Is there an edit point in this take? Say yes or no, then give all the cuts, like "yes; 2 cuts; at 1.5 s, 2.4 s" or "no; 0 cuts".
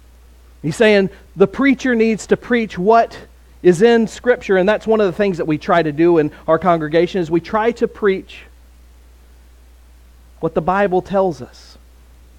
no; 0 cuts